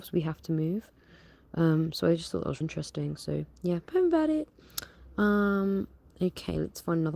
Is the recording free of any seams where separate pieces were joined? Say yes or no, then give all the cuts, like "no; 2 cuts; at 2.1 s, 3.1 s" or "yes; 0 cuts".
no; 2 cuts; at 2.6 s, 3.8 s